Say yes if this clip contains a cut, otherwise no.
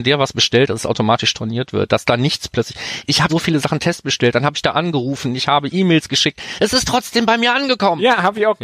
yes